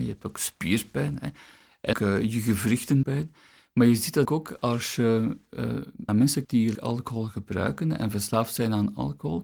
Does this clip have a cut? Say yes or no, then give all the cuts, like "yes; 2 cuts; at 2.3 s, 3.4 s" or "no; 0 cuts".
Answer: yes; 6 cuts; at 1.9 s, 3.0 s, 4.3 s, 6.1 s, 6.4 s, 6.7 s